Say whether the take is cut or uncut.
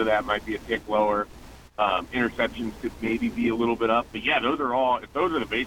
uncut